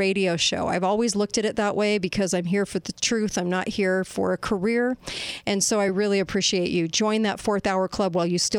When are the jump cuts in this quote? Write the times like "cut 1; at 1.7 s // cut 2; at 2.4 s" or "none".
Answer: none